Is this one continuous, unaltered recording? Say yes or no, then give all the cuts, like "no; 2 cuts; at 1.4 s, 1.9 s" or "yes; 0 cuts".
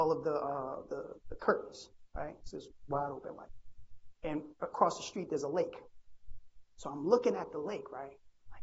no; 1 cut; at 1.2 s